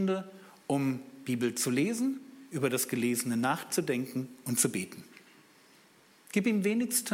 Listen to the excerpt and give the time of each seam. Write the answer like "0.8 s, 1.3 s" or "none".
none